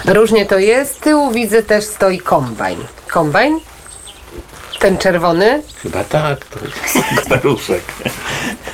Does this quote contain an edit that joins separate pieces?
yes; 3 cuts; at 1.0 s, 3.1 s, 7.2 s

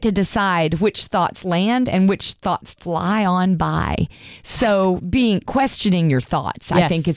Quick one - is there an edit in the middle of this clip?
yes; 2 cuts; at 2.8 s, 5.0 s

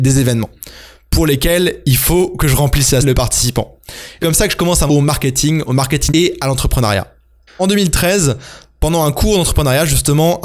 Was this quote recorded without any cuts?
no; 4 cuts; at 3.0 s, 4.2 s, 4.9 s, 6.1 s

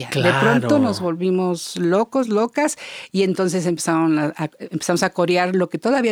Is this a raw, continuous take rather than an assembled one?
yes; 0 cuts

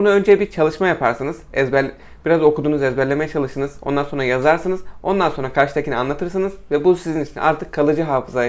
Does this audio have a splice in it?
no; 0 cuts

